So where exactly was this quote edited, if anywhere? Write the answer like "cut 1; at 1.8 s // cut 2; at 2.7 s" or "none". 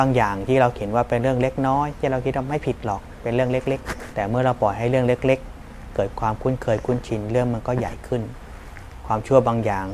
cut 1; at 4.1 s